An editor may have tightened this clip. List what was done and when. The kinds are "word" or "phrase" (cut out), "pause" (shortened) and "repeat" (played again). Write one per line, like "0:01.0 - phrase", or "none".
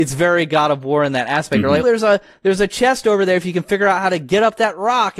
0:01.8 - word